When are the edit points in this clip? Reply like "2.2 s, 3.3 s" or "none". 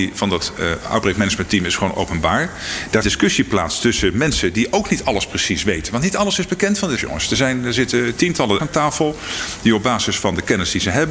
3.0 s, 7.0 s, 8.6 s

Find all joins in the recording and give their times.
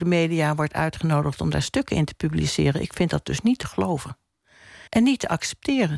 4.9 s

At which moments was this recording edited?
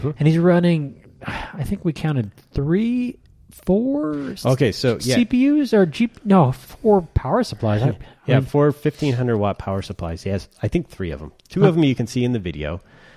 none

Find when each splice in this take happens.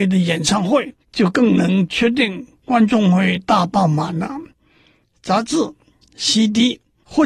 1.0 s

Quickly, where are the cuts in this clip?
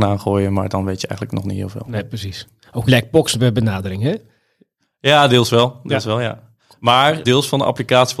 2.9 s, 7.2 s

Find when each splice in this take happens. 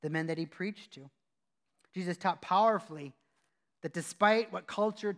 none

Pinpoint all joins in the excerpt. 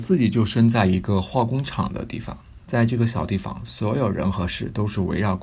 2.6 s

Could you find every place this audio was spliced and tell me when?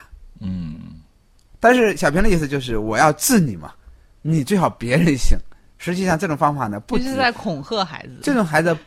5.7 s

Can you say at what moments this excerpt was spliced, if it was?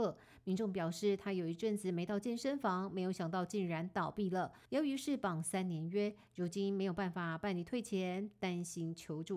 4.7 s

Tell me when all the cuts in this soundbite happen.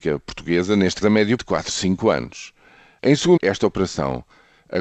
1.0 s, 1.4 s, 3.4 s

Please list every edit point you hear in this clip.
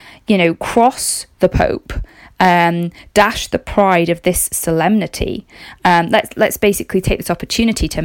none

